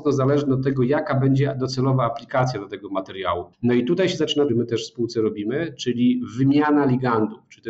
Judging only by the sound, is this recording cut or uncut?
cut